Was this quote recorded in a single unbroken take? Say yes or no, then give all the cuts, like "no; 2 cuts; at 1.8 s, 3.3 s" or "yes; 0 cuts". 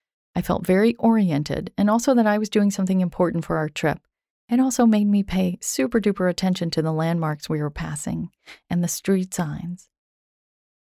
yes; 0 cuts